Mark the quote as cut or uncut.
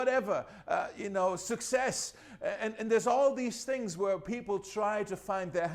uncut